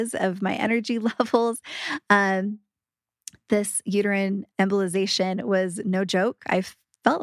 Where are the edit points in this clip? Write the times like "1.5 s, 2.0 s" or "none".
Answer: 4.5 s